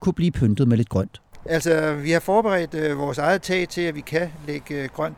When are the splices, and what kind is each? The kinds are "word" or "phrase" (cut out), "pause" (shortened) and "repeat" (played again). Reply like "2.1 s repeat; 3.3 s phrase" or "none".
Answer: none